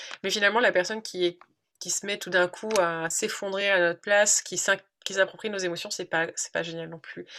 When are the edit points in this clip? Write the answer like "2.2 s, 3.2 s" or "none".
none